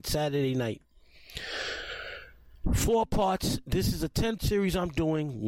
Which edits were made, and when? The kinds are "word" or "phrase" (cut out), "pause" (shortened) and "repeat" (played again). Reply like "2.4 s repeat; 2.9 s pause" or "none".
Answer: 4.4 s word